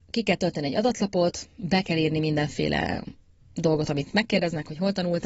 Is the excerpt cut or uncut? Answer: uncut